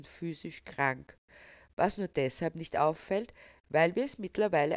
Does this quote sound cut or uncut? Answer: uncut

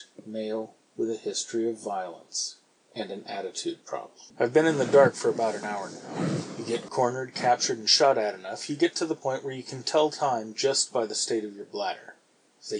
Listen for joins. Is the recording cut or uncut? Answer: uncut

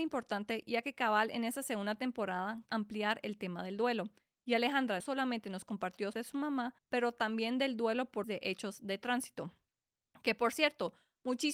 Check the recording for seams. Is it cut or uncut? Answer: cut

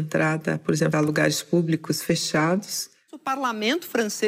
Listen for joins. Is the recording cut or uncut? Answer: cut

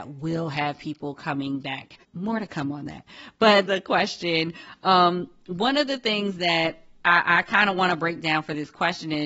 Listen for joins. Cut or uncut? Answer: cut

